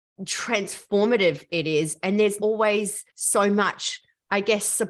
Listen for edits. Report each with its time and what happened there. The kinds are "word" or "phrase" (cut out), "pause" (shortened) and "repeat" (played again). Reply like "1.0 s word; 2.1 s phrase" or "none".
2.4 s word; 3.1 s pause